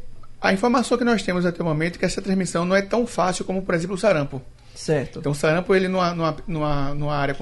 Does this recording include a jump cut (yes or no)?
no